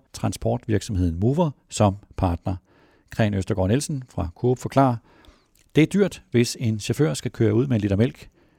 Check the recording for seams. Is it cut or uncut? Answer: uncut